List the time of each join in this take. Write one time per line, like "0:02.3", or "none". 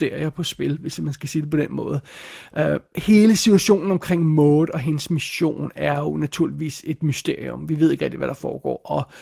none